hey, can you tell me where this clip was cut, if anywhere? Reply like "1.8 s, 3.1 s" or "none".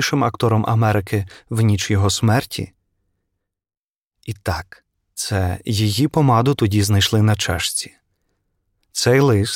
none